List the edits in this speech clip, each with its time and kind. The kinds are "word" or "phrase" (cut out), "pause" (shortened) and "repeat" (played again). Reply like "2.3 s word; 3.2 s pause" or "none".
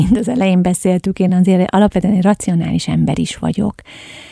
none

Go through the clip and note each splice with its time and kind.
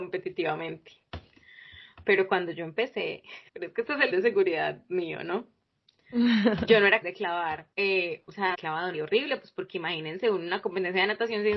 3.5 s pause; 4.1 s word; 7.0 s word; 7.7 s pause; 8.5 s word; 8.9 s word

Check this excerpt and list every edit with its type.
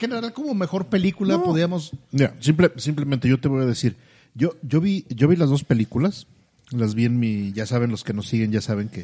none

